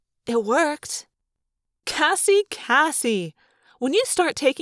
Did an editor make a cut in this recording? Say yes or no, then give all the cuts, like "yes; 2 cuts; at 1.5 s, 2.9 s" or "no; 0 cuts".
yes; 1 cut; at 2.5 s